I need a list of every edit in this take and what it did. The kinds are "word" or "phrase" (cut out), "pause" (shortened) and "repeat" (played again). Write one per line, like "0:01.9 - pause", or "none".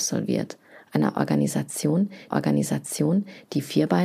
0:02.3 - repeat